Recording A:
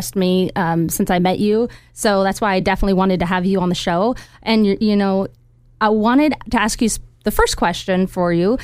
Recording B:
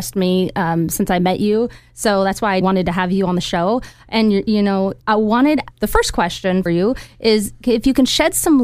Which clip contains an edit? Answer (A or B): B